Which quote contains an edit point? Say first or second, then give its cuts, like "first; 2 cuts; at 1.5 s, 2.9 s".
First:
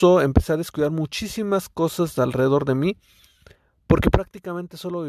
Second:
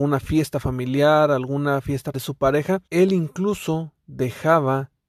second; 2 cuts; at 2.1 s, 2.9 s